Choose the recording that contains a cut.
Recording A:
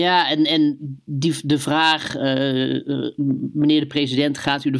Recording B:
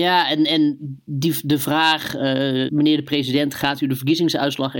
B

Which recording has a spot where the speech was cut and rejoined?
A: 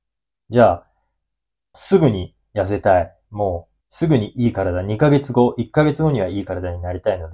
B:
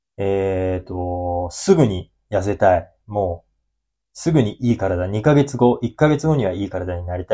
A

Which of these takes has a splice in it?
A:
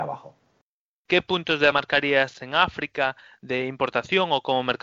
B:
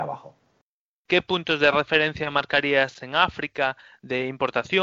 A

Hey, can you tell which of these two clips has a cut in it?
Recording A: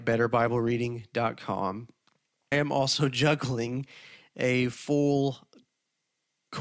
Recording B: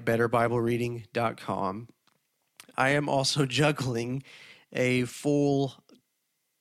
A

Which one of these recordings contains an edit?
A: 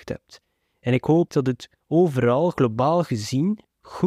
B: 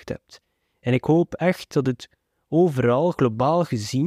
A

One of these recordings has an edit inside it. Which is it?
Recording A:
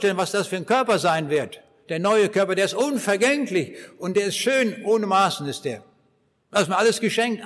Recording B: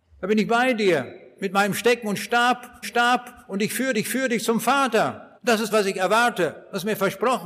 B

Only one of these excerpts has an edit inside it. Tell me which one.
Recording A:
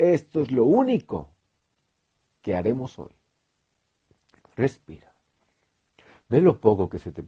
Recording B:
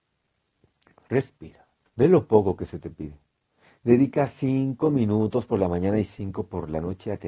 B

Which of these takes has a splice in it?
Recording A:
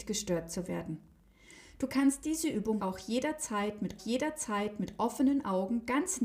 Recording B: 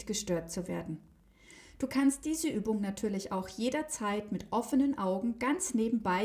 A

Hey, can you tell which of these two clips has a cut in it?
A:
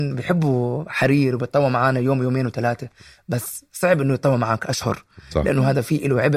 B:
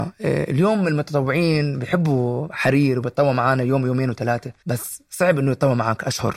B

